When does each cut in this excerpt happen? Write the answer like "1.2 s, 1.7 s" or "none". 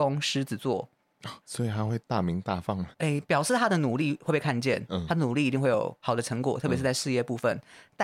2.9 s